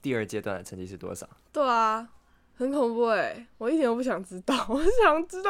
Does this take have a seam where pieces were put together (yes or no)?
no